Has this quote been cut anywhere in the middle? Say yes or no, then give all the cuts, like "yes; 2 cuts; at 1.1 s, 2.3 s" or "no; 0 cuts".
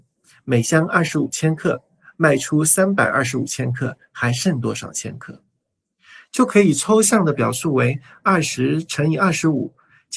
no; 0 cuts